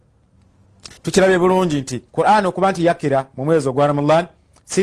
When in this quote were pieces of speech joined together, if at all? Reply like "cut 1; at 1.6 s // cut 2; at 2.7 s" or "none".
cut 1; at 1.0 s // cut 2; at 2.1 s